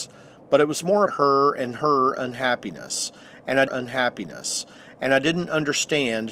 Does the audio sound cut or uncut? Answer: cut